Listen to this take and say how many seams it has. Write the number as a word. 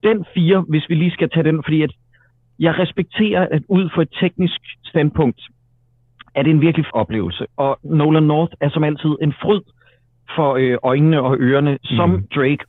one